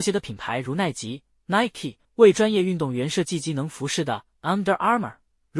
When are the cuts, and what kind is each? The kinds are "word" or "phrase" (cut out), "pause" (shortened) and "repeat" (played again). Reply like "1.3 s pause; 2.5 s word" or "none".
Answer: 2.0 s pause